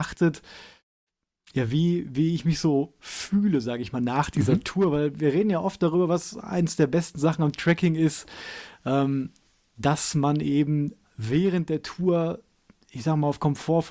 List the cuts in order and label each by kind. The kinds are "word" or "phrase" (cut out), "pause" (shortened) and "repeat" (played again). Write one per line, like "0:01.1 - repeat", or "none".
none